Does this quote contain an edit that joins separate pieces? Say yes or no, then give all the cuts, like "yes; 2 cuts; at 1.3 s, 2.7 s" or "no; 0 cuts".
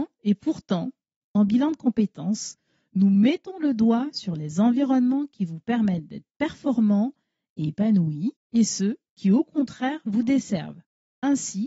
no; 0 cuts